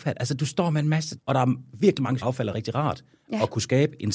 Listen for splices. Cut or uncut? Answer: cut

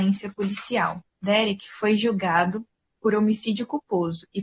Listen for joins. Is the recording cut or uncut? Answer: cut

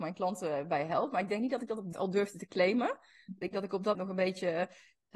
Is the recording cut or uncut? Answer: cut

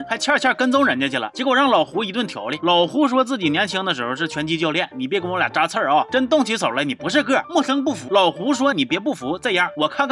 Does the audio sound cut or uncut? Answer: cut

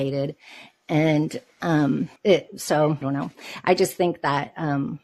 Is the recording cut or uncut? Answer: cut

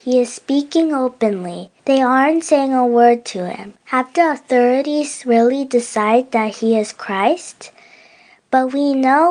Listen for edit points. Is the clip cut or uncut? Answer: cut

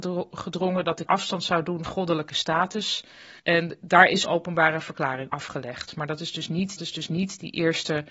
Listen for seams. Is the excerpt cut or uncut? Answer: cut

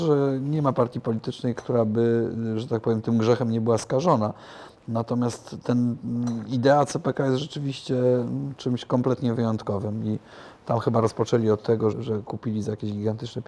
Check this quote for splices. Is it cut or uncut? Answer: cut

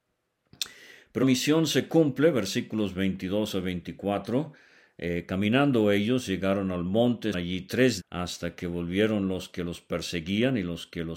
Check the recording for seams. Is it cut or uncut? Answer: cut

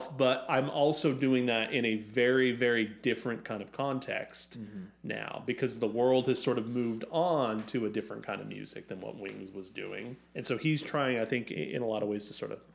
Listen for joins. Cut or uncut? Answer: cut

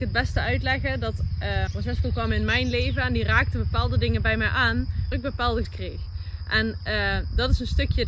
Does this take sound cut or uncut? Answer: cut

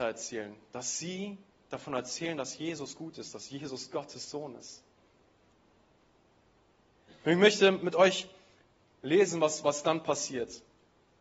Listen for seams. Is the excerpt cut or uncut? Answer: uncut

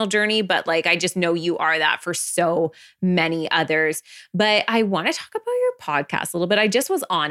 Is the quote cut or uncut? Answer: uncut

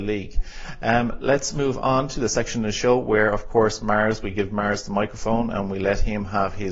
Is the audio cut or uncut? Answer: uncut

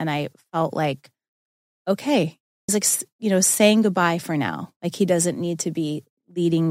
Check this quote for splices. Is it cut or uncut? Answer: cut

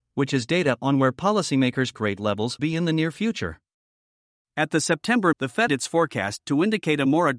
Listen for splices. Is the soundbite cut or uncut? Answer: cut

